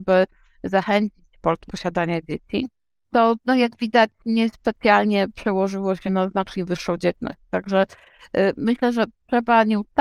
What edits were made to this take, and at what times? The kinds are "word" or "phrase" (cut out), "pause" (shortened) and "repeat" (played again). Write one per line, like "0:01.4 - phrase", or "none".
0:01.7 - phrase
0:03.4 - pause
0:04.2 - pause
0:06.1 - word

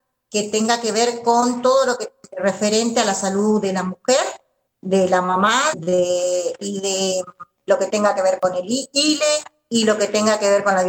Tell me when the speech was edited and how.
0:04.7 - pause
0:05.7 - word

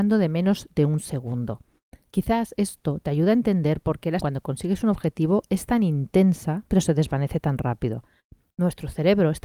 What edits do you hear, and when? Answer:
0:04.2 - word

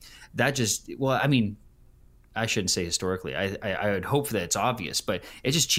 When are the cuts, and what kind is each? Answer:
none

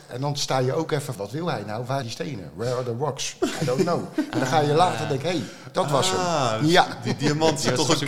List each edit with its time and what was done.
0:01.2 - word
0:02.0 - word

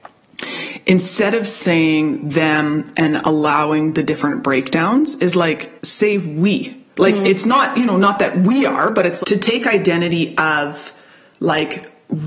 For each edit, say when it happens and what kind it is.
0:05.8 - pause
0:06.9 - pause
0:09.2 - word

